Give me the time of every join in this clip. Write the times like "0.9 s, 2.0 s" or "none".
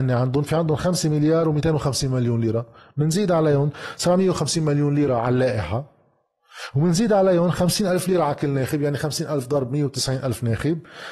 none

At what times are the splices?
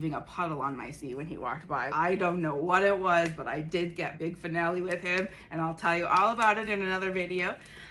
1.9 s, 4.1 s

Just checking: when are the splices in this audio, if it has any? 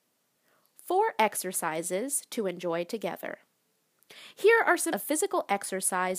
4.9 s

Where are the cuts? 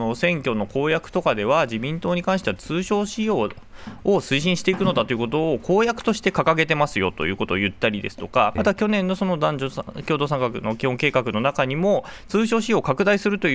8.6 s

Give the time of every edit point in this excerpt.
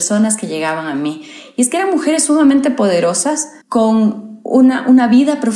3.6 s

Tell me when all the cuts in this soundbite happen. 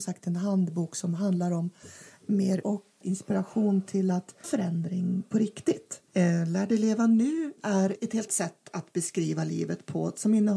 2.6 s, 3.0 s, 4.4 s, 6.1 s, 7.6 s, 8.3 s

